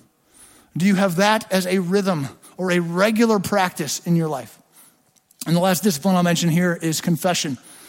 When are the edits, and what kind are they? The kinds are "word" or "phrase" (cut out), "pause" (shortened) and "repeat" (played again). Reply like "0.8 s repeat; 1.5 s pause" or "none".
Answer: none